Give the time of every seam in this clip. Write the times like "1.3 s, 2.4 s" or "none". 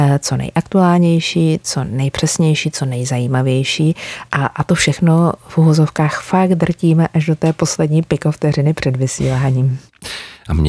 none